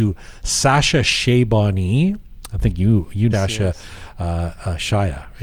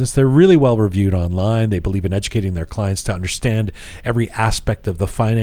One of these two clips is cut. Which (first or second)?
first